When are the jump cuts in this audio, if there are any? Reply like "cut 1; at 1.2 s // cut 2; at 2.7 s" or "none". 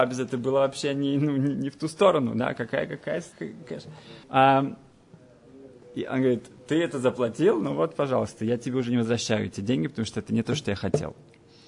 cut 1; at 3.3 s // cut 2; at 4.2 s